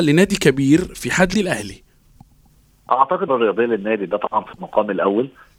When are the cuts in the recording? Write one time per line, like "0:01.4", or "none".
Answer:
0:01.3
0:03.3